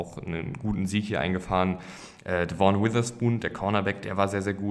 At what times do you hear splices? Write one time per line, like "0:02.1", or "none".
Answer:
none